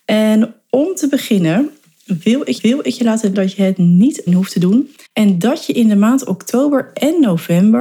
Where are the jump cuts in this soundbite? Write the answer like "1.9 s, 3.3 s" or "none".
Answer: 2.6 s, 3.3 s, 4.3 s, 5.0 s